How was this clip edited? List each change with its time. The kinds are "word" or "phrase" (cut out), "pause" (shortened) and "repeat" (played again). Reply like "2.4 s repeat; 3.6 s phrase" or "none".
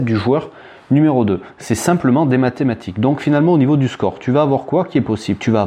none